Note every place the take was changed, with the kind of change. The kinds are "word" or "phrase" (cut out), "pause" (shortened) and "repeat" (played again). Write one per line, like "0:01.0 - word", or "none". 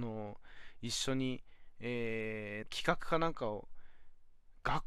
0:02.6 - phrase